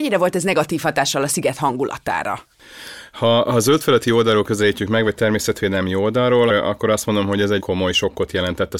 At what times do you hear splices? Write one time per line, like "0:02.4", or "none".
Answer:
0:06.5
0:07.6